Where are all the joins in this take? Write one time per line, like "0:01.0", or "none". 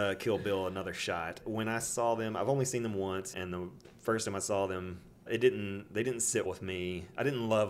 0:01.4
0:03.3
0:05.3
0:06.4

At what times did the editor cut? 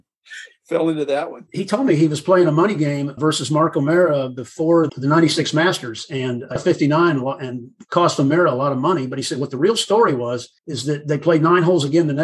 0:03.2
0:04.9
0:06.6
0:10.6

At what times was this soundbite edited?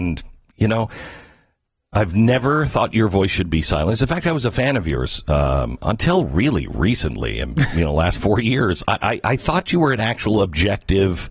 none

